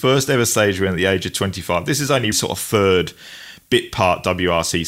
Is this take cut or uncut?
cut